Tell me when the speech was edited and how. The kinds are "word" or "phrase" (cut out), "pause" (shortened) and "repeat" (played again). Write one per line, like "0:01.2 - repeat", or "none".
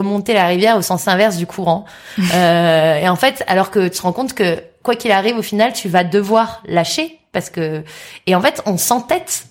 none